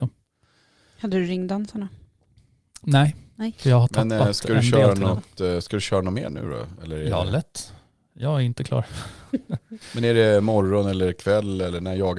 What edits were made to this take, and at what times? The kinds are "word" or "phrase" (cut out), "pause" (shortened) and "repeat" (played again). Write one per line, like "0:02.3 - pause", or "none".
none